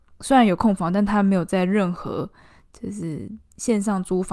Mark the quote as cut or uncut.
uncut